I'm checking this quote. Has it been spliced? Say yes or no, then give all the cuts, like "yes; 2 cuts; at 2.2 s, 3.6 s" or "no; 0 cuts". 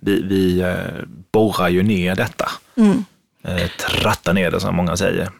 no; 0 cuts